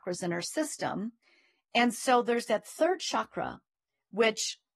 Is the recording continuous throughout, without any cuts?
yes; 0 cuts

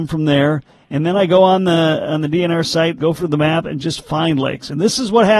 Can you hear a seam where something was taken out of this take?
yes; 1 cut; at 3.0 s

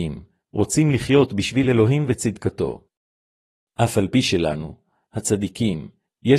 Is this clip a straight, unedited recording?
yes; 0 cuts

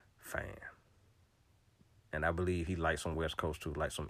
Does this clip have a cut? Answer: no; 0 cuts

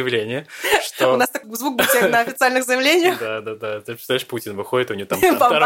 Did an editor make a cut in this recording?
yes; 1 cut; at 1.4 s

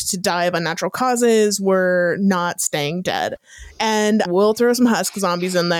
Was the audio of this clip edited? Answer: no; 0 cuts

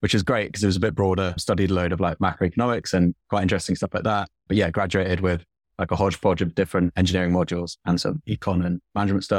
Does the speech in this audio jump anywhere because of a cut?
no; 0 cuts

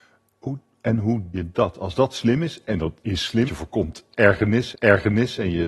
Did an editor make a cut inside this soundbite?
yes; 4 cuts; at 1.3 s, 3.0 s, 3.5 s, 4.7 s

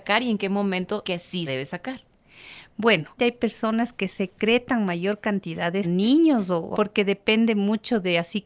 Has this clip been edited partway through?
yes; 5 cuts; at 1.0 s, 1.5 s, 3.2 s, 5.8 s, 6.7 s

